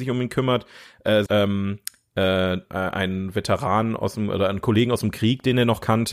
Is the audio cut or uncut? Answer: cut